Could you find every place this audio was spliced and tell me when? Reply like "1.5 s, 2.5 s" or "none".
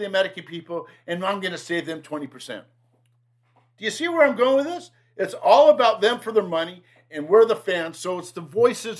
none

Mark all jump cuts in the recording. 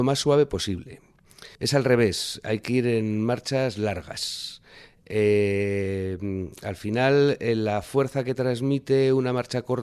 1.5 s

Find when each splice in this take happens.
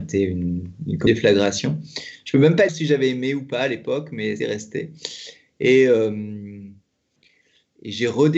1.1 s, 2.7 s, 4.4 s

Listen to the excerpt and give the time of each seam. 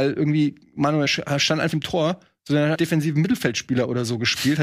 1.0 s, 1.7 s, 2.7 s

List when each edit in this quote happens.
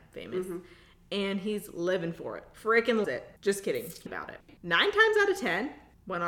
3.0 s, 3.4 s, 4.1 s

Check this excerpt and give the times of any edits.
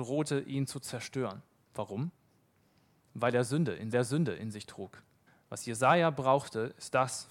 1.6 s, 3.9 s, 5.3 s

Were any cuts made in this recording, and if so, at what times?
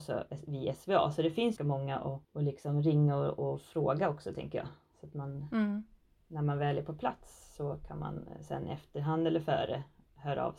1.6 s, 2.2 s

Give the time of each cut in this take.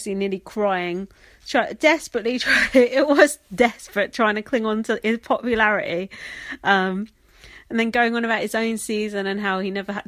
none

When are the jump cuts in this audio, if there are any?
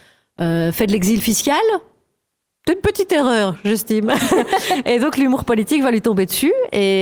none

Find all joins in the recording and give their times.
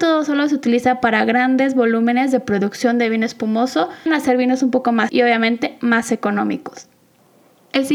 4.1 s, 5.1 s

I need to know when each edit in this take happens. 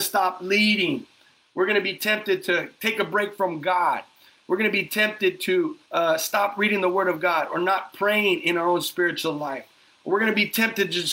5.8 s

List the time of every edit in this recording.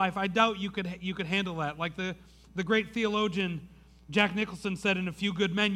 none

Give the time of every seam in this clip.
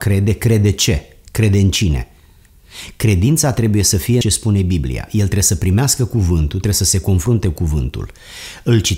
4.2 s

